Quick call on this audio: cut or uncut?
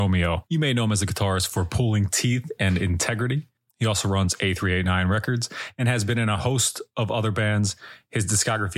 uncut